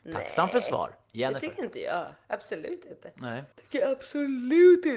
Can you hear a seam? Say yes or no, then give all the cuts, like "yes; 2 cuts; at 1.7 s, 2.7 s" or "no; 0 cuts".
yes; 1 cut; at 3.5 s